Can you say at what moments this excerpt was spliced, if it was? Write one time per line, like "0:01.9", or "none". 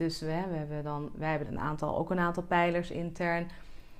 0:01.4